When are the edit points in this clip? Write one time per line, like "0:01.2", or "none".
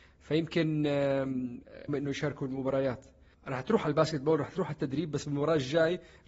0:01.9